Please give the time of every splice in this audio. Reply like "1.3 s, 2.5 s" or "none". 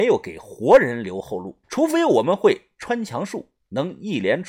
1.6 s